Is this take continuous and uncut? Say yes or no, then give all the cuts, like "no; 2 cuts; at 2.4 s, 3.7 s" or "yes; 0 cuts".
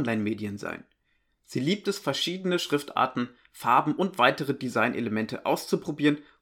yes; 0 cuts